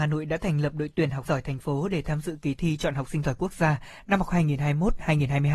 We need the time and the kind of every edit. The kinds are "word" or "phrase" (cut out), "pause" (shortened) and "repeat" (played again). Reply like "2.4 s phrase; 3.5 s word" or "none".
1.2 s word